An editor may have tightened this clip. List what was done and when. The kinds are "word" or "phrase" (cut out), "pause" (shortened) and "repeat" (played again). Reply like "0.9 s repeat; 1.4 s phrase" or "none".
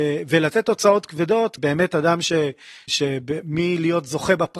1.6 s word; 2.9 s word